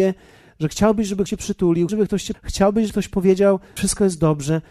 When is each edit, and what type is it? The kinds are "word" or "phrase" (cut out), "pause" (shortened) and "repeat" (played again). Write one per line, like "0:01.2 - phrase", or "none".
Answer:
0:01.3 - word
0:01.9 - word
0:02.3 - word
0:02.9 - word
0:03.8 - word